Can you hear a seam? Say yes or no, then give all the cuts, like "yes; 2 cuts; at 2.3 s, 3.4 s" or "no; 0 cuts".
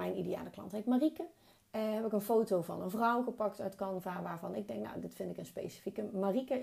no; 0 cuts